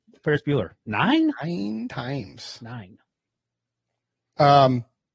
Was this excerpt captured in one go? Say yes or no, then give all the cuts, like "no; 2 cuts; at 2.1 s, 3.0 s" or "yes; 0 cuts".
yes; 0 cuts